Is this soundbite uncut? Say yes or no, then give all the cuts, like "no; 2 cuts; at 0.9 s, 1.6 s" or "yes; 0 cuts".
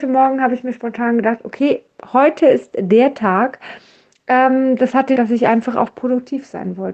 no; 1 cut; at 5.2 s